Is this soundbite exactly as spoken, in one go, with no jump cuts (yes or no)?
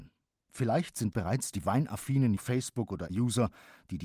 no